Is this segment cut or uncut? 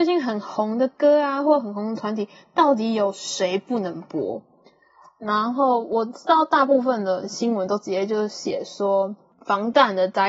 uncut